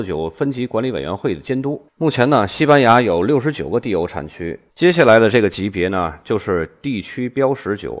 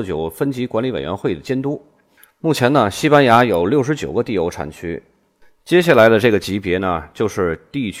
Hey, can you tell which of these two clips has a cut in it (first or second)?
first